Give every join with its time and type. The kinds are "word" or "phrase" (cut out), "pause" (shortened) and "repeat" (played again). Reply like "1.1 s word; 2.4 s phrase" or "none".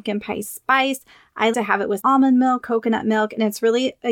1.5 s word; 2.0 s word; 2.6 s word